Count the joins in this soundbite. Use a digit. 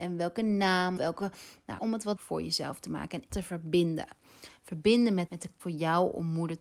6